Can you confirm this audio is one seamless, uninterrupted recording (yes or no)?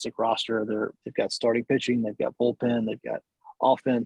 no